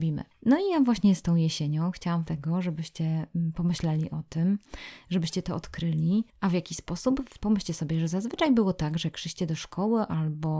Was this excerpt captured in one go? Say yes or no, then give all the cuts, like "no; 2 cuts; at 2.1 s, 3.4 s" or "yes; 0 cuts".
no; 1 cut; at 2.2 s